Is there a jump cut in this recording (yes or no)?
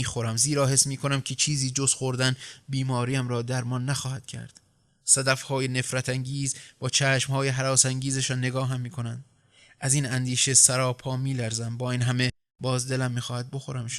no